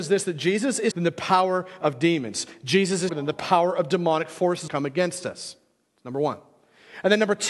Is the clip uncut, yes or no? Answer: no